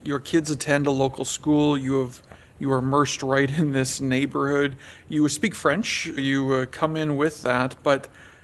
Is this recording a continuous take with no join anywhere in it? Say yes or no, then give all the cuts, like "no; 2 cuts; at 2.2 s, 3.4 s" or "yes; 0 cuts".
no; 1 cut; at 6.2 s